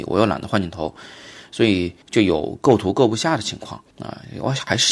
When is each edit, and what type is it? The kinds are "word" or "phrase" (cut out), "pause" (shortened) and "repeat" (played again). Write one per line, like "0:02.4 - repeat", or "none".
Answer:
0:02.0 - pause
0:03.9 - pause